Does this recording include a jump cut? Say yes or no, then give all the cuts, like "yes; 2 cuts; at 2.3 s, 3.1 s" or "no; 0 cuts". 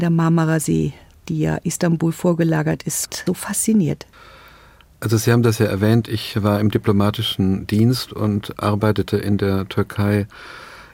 no; 0 cuts